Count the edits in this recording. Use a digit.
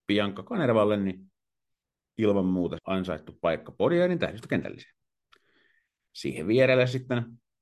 1